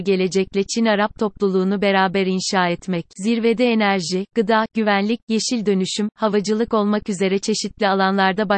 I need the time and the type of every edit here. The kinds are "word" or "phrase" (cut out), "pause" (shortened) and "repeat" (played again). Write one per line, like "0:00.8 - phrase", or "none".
0:03.1 - pause